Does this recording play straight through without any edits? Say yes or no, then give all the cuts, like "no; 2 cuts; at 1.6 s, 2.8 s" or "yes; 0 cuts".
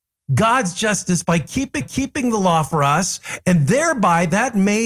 no; 1 cut; at 1.8 s